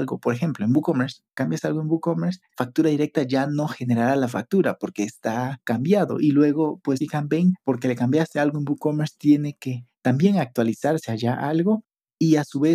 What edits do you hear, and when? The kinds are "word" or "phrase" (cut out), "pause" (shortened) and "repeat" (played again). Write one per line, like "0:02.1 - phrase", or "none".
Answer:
0:01.3 - pause
0:02.5 - word
0:07.0 - phrase